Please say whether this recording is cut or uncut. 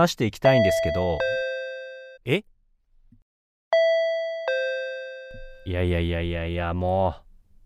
cut